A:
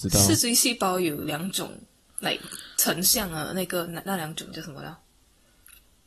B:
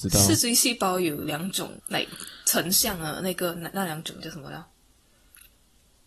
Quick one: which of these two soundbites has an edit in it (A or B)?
B